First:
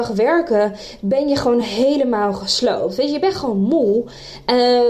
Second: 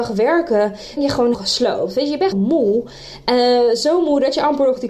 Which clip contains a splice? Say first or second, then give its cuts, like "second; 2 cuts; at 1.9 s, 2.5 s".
second; 3 cuts; at 1.0 s, 1.3 s, 2.3 s